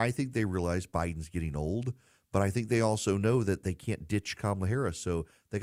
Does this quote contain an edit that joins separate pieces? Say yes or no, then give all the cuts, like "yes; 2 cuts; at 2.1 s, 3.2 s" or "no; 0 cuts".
no; 0 cuts